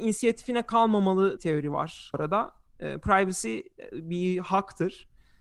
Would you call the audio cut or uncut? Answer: cut